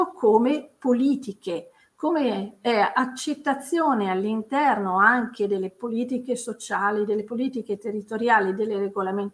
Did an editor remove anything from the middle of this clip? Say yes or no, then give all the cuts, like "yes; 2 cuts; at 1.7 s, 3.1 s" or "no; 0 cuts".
no; 0 cuts